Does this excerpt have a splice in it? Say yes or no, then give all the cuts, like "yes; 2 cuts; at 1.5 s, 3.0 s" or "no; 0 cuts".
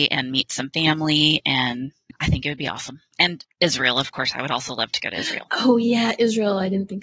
no; 0 cuts